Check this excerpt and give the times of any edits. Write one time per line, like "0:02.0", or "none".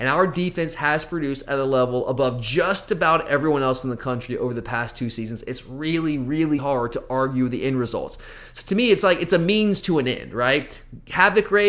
0:06.6